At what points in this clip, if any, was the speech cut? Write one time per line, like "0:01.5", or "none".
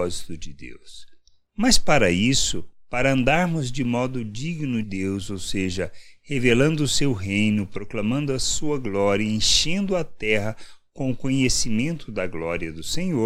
0:04.8